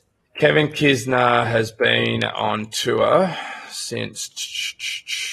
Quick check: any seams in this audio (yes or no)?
no